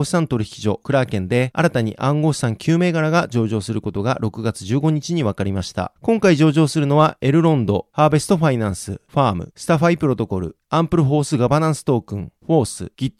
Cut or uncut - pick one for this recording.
cut